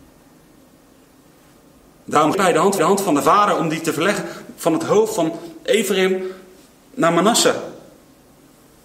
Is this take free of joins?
no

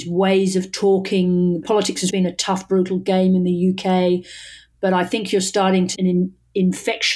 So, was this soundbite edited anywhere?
yes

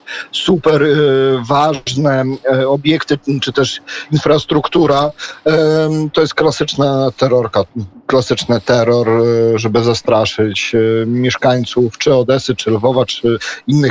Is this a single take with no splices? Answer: yes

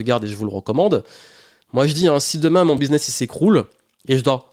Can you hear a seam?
no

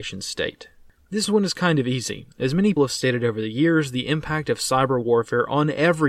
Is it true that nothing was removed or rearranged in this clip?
no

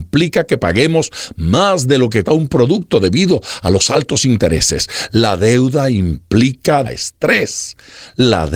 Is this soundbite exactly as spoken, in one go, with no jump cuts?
no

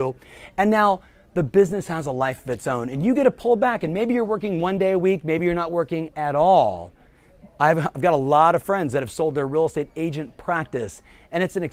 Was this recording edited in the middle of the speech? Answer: no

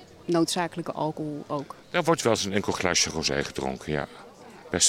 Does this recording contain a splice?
no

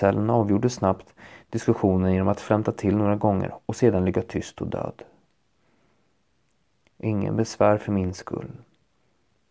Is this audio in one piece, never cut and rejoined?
yes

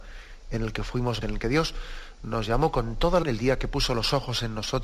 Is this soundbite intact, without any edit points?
no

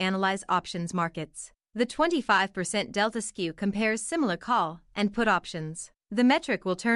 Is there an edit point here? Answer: no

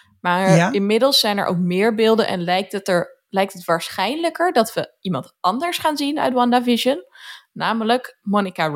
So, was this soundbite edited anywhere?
no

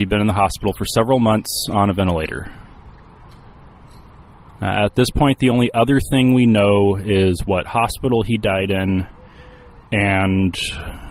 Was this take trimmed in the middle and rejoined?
no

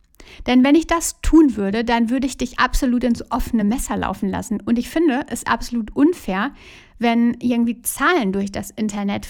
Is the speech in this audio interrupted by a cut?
no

